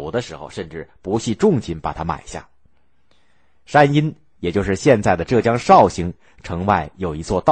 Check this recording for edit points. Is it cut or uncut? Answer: uncut